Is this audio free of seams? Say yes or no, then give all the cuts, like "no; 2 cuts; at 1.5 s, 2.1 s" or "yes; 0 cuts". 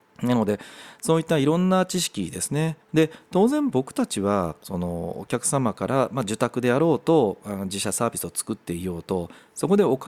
no; 1 cut; at 2.8 s